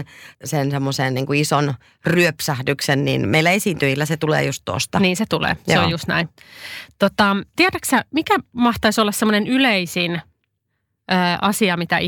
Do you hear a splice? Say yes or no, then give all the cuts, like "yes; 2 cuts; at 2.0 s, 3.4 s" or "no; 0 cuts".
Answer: no; 0 cuts